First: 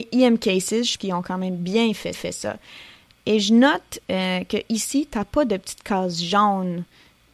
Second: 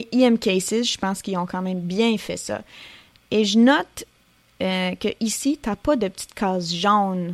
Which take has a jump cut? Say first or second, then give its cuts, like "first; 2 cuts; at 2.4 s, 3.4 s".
first; 3 cuts; at 1.0 s, 2.1 s, 4.0 s